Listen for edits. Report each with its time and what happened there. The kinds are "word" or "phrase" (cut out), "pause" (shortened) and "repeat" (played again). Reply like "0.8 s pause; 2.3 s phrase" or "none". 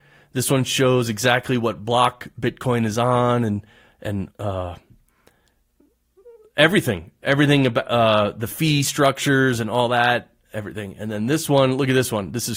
4.3 s phrase